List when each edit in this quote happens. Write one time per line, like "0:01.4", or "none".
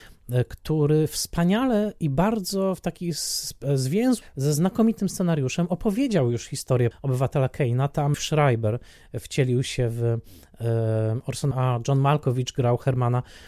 0:04.2
0:06.9
0:08.1
0:11.5